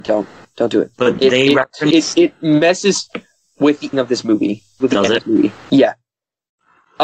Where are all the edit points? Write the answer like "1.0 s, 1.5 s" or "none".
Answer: 0.9 s, 3.9 s, 4.8 s, 5.2 s